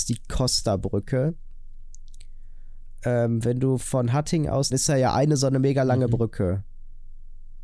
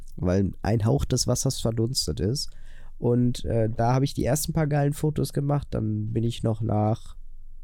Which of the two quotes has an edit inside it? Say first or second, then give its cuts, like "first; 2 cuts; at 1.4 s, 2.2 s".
first; 1 cut; at 4.7 s